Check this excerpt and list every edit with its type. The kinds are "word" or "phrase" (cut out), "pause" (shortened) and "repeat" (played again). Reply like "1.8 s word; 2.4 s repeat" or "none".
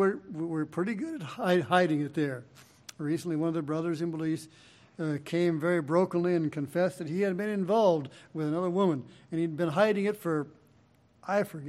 none